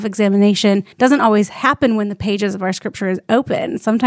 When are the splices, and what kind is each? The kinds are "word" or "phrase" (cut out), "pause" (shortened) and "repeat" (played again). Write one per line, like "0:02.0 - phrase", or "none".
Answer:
0:00.9 - pause